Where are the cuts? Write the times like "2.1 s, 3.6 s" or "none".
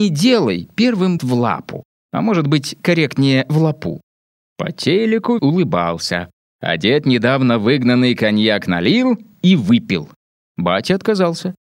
1.2 s, 5.4 s